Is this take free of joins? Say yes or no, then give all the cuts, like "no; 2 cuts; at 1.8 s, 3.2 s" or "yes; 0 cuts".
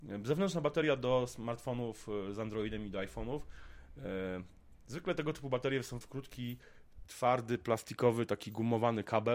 no; 1 cut; at 6.0 s